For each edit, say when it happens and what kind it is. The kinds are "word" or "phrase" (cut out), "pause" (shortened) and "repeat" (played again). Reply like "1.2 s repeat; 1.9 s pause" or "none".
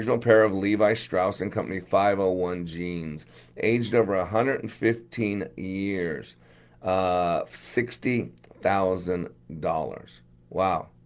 none